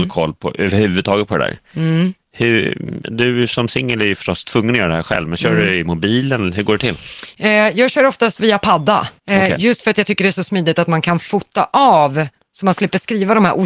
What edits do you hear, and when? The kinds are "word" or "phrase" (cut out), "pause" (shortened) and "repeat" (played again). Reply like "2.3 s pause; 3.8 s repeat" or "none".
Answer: 9.2 s pause